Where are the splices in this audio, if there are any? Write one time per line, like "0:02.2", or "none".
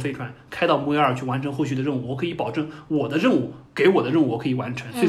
0:03.7